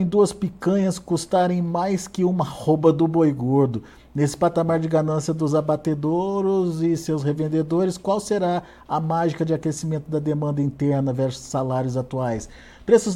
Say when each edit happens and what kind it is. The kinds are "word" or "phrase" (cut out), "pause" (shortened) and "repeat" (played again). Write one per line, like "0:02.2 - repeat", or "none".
none